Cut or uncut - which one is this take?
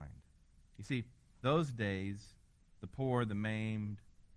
cut